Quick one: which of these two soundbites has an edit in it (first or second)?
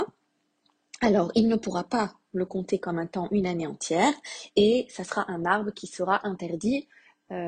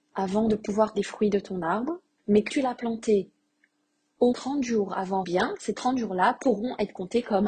second